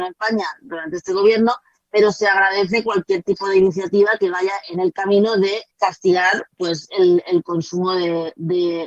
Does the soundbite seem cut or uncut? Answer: cut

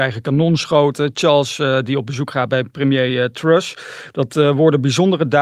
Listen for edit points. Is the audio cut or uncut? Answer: uncut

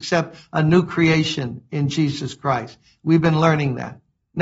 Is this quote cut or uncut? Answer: uncut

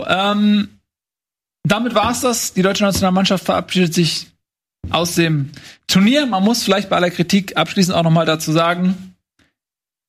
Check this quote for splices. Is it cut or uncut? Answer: uncut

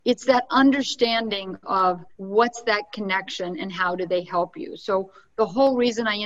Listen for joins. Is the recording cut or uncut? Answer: cut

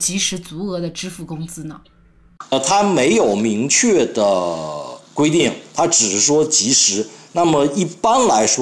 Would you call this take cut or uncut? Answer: cut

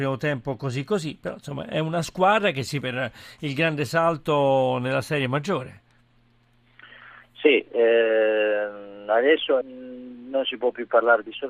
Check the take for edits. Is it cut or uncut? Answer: cut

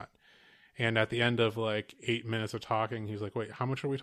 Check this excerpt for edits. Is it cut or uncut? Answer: uncut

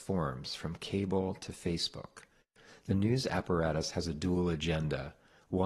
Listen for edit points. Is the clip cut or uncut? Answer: uncut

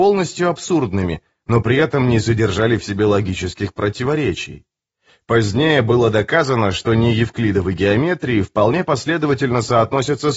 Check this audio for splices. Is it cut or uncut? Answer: uncut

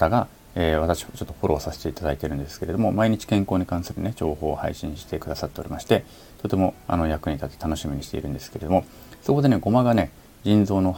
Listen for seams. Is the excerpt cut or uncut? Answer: uncut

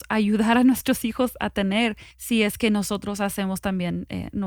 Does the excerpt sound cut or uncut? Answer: cut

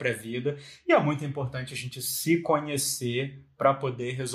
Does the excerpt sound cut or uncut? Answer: uncut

